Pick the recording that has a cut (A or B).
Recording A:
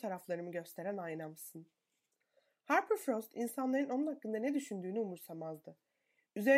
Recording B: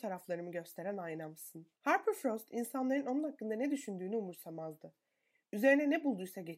B